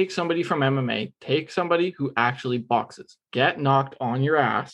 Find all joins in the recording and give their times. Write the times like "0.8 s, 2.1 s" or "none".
3.2 s